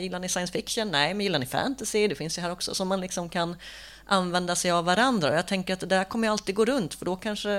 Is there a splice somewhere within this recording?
no; 0 cuts

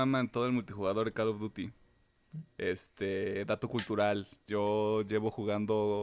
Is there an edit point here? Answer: no; 0 cuts

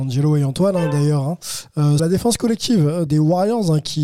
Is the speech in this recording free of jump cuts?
no; 2 cuts; at 2.0 s, 3.1 s

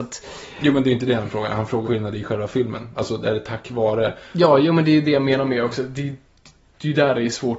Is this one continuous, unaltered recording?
no; 1 cut; at 1.8 s

